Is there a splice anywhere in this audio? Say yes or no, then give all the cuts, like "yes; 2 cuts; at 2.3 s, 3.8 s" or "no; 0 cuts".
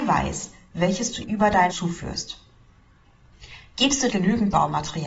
yes; 3 cuts; at 1.2 s, 1.7 s, 4.1 s